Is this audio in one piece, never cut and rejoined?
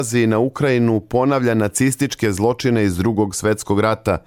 yes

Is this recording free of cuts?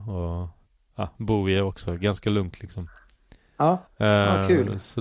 no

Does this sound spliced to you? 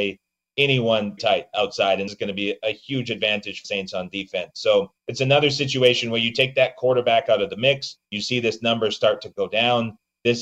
yes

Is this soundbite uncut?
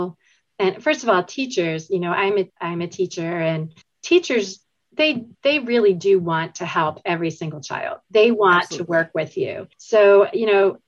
no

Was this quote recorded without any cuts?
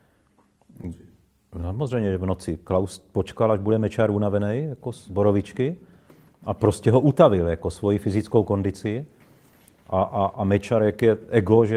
yes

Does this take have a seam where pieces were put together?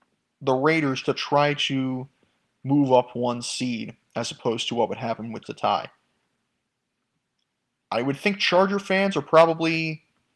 yes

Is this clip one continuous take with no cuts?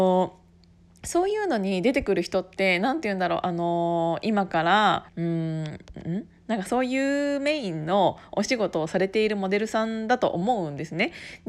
no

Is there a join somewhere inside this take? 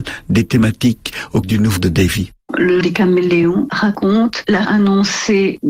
yes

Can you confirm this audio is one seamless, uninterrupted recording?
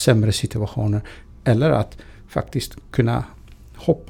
yes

